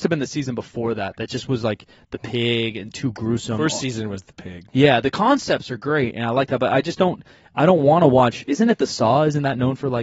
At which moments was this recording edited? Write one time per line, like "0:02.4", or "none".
none